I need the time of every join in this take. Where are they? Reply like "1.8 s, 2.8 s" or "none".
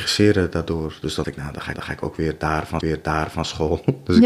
1.2 s, 1.7 s, 2.8 s